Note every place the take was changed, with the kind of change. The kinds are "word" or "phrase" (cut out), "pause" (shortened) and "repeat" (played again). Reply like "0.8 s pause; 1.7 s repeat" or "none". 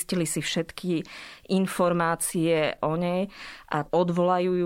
none

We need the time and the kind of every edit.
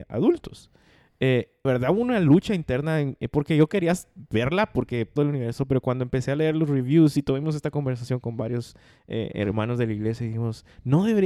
1.6 s phrase; 5.2 s phrase

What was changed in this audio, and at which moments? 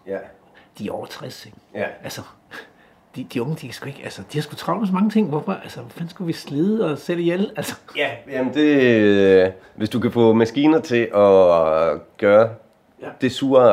none

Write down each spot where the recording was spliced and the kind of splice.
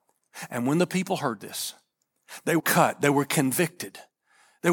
2.6 s word

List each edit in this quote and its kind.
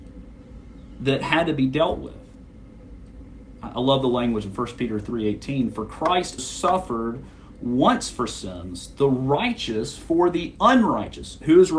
6.4 s word

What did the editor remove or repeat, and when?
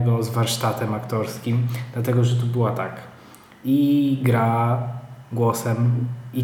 none

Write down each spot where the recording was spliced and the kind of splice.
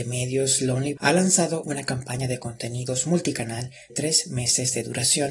1.0 s word; 1.6 s word; 3.9 s word

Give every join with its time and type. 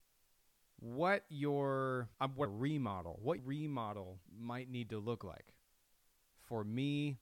2.1 s pause; 2.5 s phrase; 3.4 s word; 4.3 s pause

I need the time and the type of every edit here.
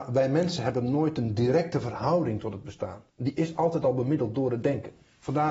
3.1 s pause

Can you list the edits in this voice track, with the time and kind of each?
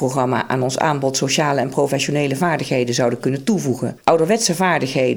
4.0 s pause

